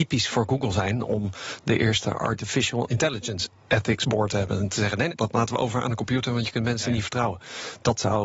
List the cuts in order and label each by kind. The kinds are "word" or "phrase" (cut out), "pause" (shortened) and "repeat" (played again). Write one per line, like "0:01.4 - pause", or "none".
0:05.1 - word